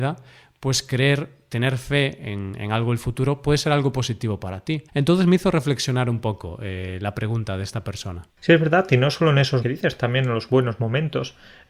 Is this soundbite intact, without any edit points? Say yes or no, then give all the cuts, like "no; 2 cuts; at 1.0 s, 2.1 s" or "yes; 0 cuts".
no; 3 cuts; at 4.9 s, 8.3 s, 9.6 s